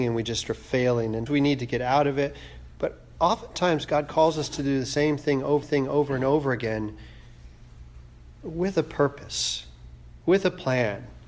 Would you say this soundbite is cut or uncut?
cut